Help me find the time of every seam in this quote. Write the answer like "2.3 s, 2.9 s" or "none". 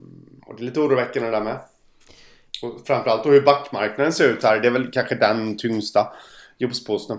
none